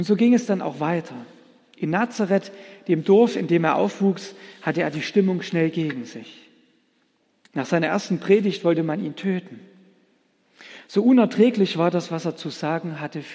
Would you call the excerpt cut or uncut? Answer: uncut